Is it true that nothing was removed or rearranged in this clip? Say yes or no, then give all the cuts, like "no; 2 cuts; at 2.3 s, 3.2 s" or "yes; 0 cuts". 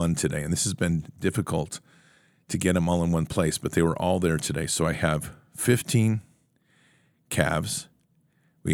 yes; 0 cuts